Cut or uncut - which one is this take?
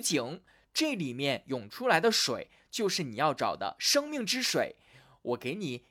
uncut